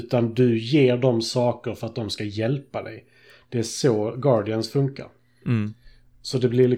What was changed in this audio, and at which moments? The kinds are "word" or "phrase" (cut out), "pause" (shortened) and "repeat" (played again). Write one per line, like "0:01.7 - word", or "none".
none